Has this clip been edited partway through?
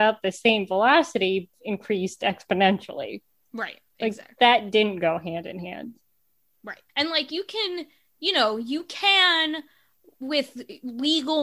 yes; 2 cuts; at 1.5 s, 6.9 s

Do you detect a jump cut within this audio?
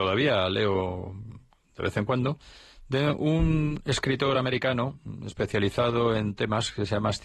no; 0 cuts

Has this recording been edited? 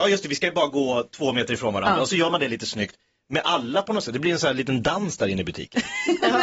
no; 0 cuts

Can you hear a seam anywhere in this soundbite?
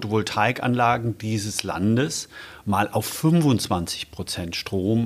no; 0 cuts

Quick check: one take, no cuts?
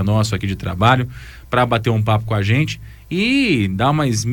yes; 0 cuts

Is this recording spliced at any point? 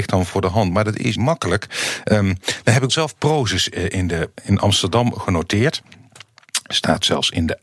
yes; 3 cuts; at 1.2 s, 2.9 s, 4.3 s

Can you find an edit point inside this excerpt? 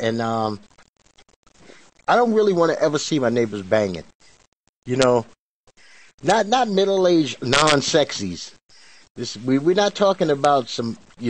no; 0 cuts

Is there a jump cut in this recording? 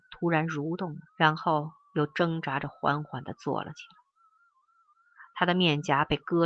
yes; 1 cut; at 1.1 s

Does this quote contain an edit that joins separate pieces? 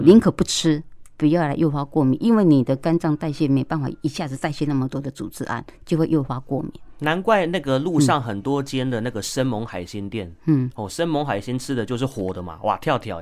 no; 0 cuts

